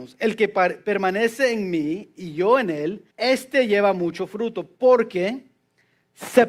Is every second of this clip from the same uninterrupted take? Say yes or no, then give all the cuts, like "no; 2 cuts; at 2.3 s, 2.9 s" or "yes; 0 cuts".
no; 1 cut; at 3.1 s